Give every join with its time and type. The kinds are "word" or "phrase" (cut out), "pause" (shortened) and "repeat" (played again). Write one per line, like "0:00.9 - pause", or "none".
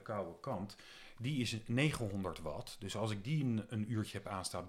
none

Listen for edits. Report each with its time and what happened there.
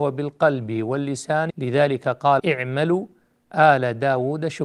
0:01.5 - word
0:02.4 - word

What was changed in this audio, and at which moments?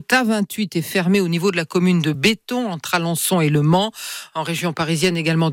none

